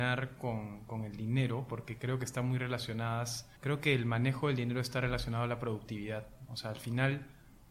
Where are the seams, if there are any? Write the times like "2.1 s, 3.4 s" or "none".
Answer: 3.6 s